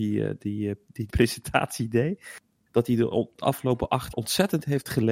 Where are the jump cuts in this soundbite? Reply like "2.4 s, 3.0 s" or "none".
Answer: 1.1 s, 4.1 s